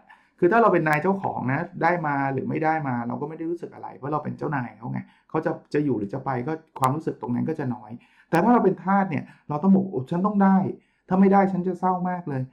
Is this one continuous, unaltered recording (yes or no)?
yes